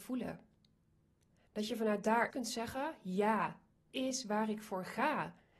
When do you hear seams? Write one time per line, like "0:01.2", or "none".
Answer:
0:02.3
0:03.9